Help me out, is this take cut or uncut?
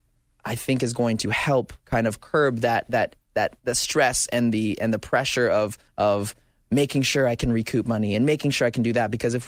cut